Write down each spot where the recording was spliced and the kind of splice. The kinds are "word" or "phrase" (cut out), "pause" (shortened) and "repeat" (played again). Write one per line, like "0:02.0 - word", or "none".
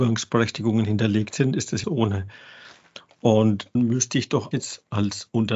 0:01.8 - phrase
0:03.8 - word
0:04.5 - word